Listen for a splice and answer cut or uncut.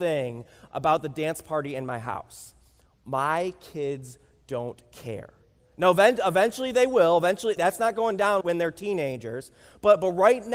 cut